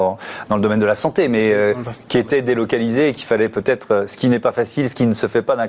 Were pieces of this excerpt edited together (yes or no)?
no